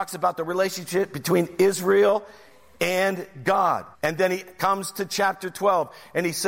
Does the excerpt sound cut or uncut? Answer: cut